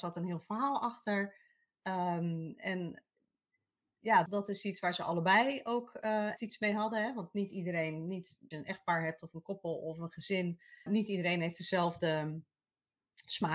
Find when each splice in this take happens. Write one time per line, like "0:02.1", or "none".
0:04.3
0:06.4
0:08.5
0:10.9